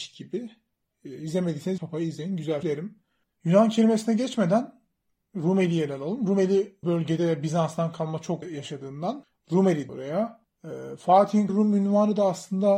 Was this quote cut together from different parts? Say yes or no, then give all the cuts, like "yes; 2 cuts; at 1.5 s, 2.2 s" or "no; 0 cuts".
yes; 6 cuts; at 1.8 s, 2.6 s, 6.8 s, 8.4 s, 9.9 s, 11.5 s